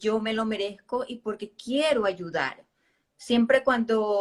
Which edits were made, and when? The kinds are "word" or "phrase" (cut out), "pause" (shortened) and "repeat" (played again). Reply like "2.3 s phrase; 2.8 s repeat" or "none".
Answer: none